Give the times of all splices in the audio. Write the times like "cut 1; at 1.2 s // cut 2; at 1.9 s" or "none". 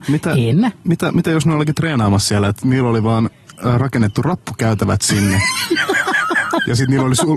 none